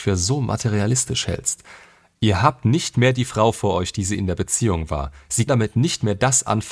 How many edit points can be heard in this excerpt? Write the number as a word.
one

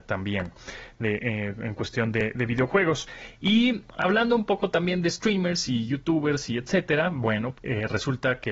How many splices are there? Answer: one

